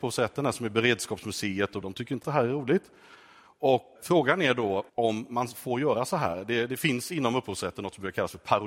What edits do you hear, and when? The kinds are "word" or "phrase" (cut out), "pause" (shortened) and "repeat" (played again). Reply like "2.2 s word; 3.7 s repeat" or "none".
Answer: 1.8 s phrase; 2.2 s phrase; 4.0 s word; 4.9 s pause